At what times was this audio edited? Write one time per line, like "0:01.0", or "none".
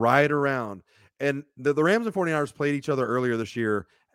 none